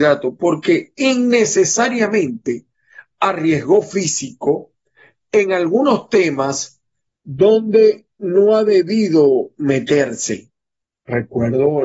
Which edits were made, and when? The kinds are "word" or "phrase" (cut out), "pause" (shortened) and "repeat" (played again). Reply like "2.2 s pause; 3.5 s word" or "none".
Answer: none